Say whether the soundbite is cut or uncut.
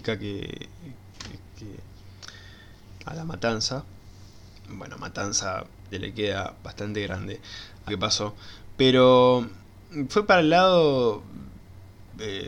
cut